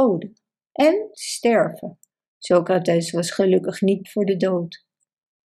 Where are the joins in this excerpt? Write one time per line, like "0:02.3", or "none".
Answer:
0:01.1
0:02.1
0:04.0